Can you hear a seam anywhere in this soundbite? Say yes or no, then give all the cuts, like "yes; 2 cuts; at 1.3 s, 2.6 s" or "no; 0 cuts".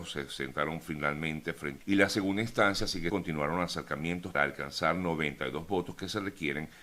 yes; 3 cuts; at 1.8 s, 3.1 s, 4.3 s